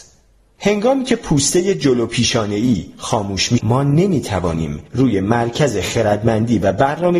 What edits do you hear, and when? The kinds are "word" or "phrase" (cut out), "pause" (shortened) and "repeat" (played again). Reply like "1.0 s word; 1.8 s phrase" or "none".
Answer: 3.6 s word